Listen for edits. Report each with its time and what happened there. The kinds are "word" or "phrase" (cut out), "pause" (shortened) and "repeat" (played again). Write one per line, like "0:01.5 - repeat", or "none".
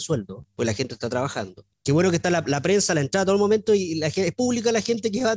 0:01.7 - pause